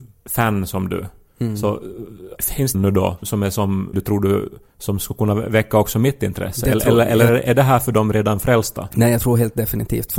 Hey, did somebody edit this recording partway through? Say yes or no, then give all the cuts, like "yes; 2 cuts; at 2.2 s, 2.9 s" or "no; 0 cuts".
yes; 3 cuts; at 2.7 s, 3.2 s, 3.9 s